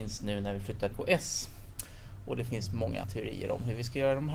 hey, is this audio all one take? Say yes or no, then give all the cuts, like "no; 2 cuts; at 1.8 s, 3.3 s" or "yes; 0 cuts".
no; 2 cuts; at 0.9 s, 3.0 s